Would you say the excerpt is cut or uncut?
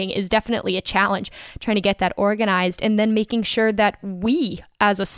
uncut